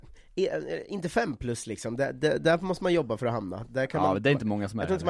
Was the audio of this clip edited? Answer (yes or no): no